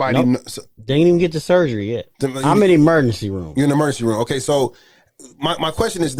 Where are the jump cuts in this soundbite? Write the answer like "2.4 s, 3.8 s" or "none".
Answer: 2.1 s